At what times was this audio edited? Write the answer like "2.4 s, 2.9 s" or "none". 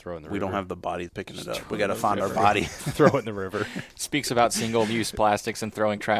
1.1 s